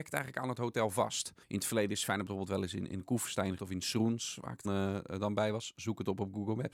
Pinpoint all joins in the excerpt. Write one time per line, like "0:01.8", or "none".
0:01.4
0:03.6
0:04.6